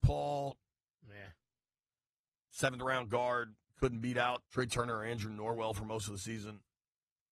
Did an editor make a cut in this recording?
yes; 2 cuts; at 3.6 s, 4.5 s

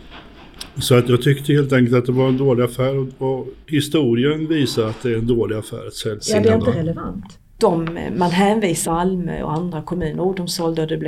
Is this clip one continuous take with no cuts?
no; 2 cuts; at 3.6 s, 8.8 s

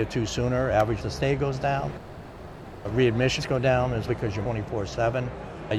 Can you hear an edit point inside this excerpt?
yes; 4 cuts; at 1.0 s, 3.4 s, 4.1 s, 4.4 s

